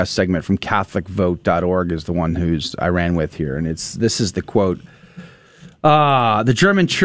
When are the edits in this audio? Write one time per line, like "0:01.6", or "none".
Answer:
none